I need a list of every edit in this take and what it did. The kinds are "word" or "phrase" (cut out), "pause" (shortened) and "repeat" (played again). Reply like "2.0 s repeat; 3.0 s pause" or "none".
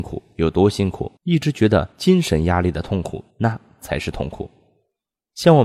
1.2 s pause; 1.9 s pause; 3.3 s pause